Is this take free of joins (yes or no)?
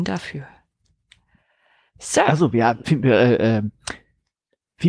no